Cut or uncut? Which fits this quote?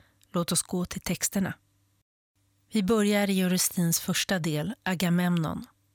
uncut